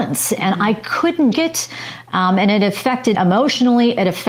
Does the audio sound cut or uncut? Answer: cut